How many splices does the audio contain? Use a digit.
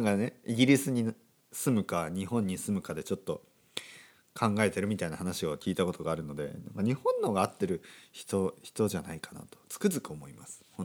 0